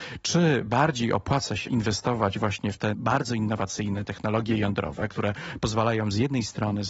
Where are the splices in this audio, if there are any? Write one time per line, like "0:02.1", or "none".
0:01.7